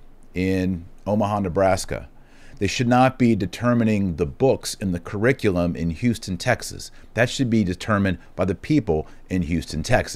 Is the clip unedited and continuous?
yes; 0 cuts

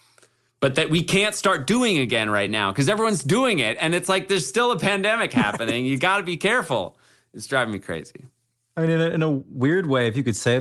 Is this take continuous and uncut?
yes; 0 cuts

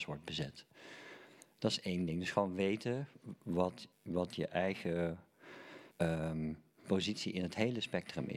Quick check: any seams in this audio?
yes; 2 cuts; at 3.9 s, 5.9 s

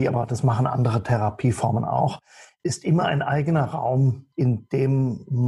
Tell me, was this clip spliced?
no; 0 cuts

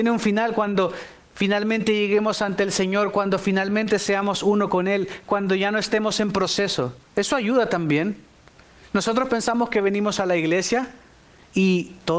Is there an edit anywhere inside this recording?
yes; 1 cut; at 7.1 s

